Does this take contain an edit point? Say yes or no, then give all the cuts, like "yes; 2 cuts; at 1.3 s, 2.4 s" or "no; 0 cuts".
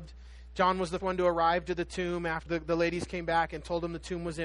yes; 2 cuts; at 1.0 s, 2.5 s